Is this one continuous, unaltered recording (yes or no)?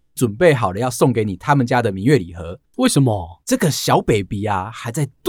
no